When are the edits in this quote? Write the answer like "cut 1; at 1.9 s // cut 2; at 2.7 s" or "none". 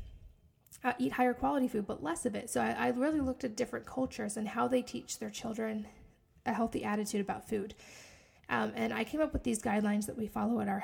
none